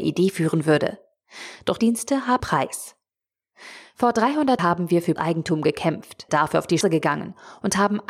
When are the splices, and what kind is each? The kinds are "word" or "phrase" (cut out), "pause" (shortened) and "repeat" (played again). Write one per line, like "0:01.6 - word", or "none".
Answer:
0:01.8 - word
0:02.4 - word
0:04.6 - word
0:05.2 - word
0:06.3 - word
0:06.8 - word